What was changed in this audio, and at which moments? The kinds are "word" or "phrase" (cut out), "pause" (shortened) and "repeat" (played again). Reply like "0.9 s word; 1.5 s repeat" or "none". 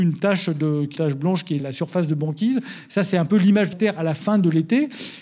1.0 s word; 1.6 s word; 3.7 s word